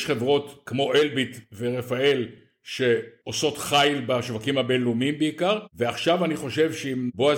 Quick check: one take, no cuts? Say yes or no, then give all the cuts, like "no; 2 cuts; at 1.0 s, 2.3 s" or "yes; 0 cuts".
yes; 0 cuts